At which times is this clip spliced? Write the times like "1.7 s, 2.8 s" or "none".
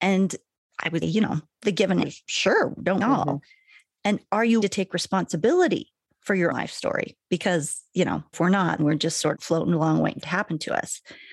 1.0 s, 2.0 s, 3.0 s, 4.6 s, 6.5 s, 8.3 s, 8.8 s, 9.3 s, 10.2 s